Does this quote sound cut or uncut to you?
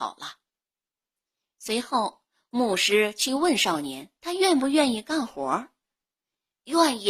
cut